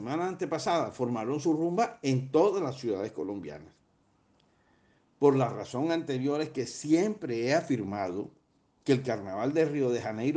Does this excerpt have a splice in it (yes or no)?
no